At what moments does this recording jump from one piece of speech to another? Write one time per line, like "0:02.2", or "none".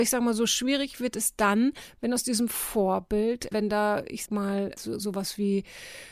0:03.5
0:04.3
0:04.8